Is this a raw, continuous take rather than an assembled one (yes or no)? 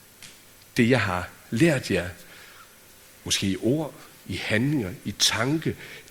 yes